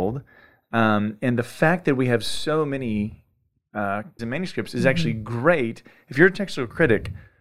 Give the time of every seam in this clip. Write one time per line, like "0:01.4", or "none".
0:04.2